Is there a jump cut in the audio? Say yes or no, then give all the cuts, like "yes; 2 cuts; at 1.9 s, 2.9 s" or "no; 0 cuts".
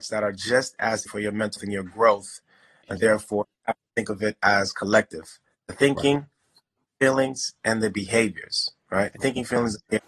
yes; 3 cuts; at 1.1 s, 1.6 s, 3.0 s